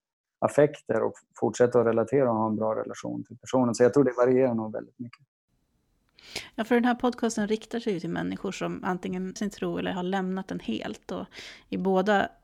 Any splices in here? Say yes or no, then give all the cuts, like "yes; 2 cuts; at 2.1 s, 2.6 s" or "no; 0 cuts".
yes; 1 cut; at 9.4 s